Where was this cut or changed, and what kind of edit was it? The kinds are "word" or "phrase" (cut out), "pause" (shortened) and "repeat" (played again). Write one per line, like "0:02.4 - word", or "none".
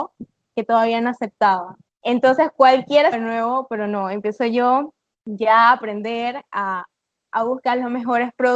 0:01.9 - pause
0:03.1 - phrase
0:05.1 - pause